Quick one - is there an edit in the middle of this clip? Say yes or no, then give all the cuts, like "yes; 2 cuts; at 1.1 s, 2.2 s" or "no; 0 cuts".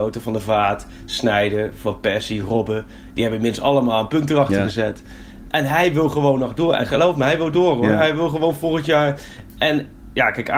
no; 0 cuts